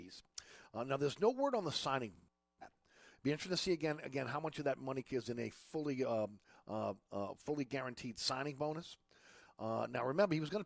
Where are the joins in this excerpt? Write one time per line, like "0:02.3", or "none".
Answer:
none